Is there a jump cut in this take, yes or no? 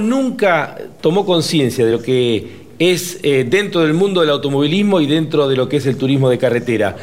no